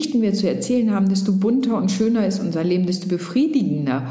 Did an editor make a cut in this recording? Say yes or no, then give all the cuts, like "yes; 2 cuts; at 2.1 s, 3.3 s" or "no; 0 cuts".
no; 0 cuts